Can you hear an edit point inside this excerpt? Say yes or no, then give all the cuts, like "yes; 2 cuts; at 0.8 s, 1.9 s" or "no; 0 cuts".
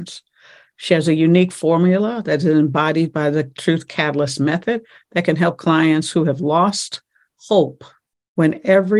no; 0 cuts